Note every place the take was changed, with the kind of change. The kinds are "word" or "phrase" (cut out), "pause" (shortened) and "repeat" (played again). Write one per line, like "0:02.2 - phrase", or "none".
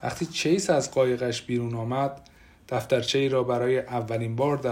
none

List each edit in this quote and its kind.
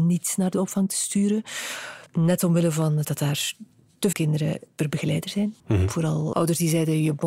0:02.1 - pause
0:03.0 - word
0:04.1 - word
0:05.6 - pause
0:06.3 - word

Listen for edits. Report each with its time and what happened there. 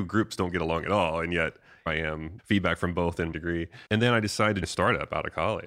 0:01.9 - word
0:02.4 - word
0:03.3 - word
0:03.9 - pause
0:04.6 - word

